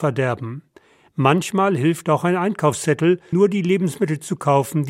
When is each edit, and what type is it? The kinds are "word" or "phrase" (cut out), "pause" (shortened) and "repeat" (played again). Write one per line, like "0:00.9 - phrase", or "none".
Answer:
0:03.3 - word